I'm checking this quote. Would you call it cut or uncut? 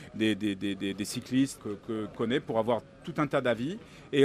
cut